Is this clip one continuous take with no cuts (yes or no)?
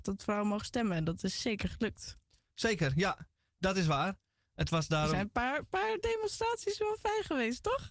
yes